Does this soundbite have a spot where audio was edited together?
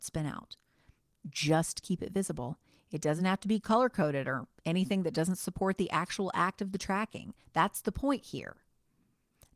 no; 0 cuts

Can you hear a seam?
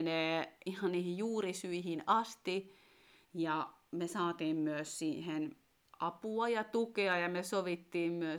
no; 0 cuts

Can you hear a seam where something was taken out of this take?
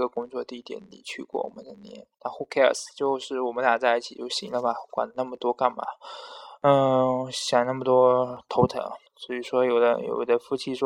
yes; 2 cuts; at 2.1 s, 9.1 s

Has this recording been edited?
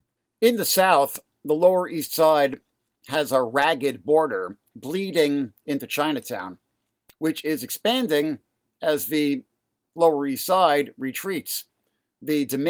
no; 0 cuts

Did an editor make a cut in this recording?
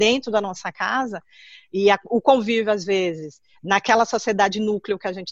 no; 0 cuts

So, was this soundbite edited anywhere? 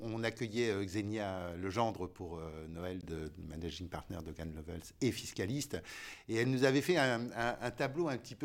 no; 0 cuts

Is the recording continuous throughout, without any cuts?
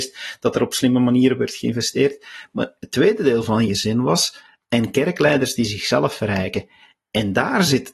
yes; 0 cuts

